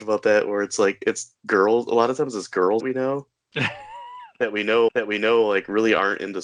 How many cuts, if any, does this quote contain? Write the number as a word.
two